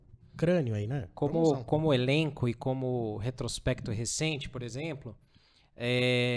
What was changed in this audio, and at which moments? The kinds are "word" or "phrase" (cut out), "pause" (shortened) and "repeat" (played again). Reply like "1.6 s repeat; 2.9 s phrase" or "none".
none